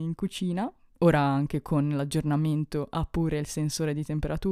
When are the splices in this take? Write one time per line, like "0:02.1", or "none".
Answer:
none